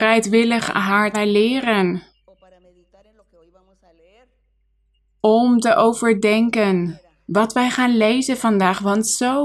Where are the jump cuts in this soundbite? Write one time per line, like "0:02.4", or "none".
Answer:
0:01.1